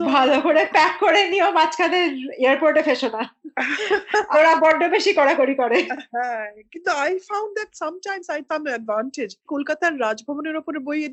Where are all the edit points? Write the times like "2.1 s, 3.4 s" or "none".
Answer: 4.3 s, 8.5 s, 9.5 s